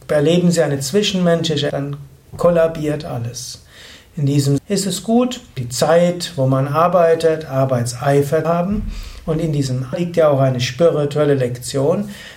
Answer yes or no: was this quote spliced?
yes